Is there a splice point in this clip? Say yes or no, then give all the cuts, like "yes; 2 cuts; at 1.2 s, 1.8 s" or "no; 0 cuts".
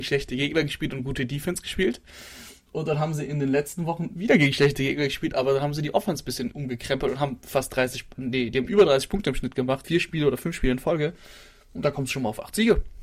yes; 2 cuts; at 6.5 s, 9.8 s